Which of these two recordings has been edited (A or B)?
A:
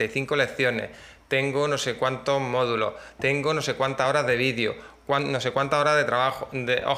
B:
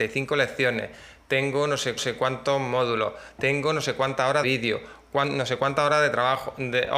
B